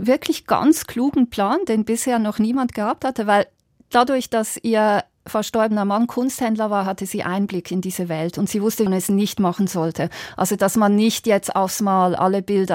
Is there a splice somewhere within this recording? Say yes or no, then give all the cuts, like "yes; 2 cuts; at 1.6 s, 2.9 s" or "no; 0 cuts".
yes; 2 cuts; at 3.9 s, 8.9 s